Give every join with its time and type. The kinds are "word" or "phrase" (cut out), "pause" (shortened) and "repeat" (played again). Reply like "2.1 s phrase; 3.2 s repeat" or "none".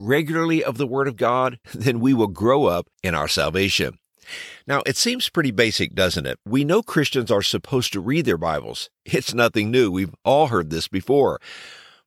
1.6 s pause; 2.9 s pause; 6.4 s pause